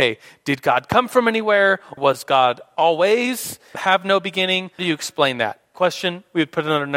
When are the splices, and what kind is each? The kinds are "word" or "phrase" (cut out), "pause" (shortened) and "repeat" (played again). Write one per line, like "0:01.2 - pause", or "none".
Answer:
0:02.0 - word
0:03.7 - word
0:04.8 - word
0:05.7 - word